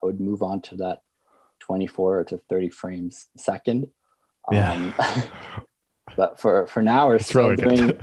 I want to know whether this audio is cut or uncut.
uncut